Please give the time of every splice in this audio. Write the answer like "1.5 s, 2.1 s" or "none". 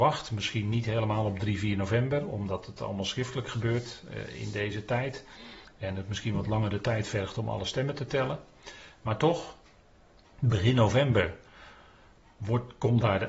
none